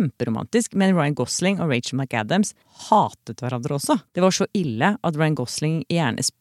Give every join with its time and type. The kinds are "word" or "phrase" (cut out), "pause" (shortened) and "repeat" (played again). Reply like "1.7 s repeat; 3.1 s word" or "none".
2.6 s pause; 4.1 s pause